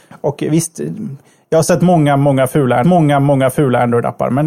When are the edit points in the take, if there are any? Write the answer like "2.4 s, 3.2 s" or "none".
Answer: 2.8 s

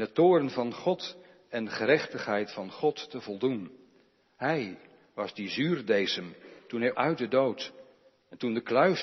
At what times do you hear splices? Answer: 6.6 s, 6.9 s

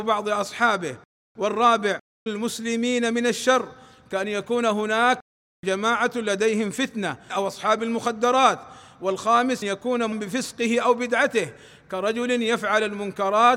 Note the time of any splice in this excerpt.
2.3 s, 7.3 s, 9.6 s, 10.1 s

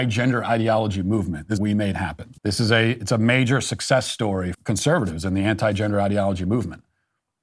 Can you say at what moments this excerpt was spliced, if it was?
1.6 s, 2.4 s, 4.5 s

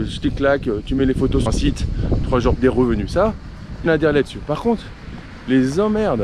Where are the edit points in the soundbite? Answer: 1.5 s, 2.5 s, 3.9 s

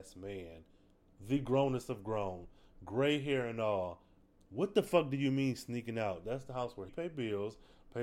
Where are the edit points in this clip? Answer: 6.9 s

